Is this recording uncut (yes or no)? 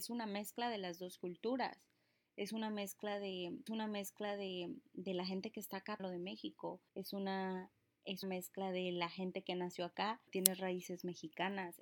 no